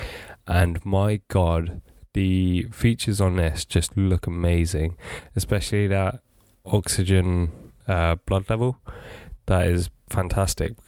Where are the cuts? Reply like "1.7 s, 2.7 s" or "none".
none